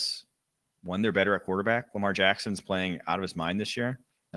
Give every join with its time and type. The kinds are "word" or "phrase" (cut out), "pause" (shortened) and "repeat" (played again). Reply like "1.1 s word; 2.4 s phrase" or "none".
none